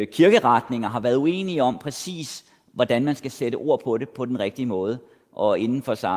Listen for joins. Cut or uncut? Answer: uncut